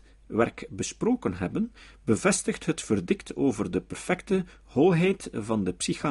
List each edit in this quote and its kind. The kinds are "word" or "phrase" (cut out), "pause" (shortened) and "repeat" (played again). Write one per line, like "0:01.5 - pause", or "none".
none